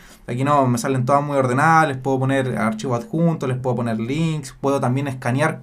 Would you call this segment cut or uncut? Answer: uncut